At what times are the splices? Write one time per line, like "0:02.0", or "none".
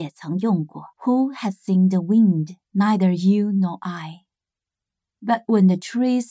0:00.9
0:02.6